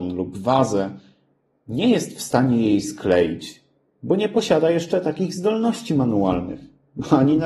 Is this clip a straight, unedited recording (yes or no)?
yes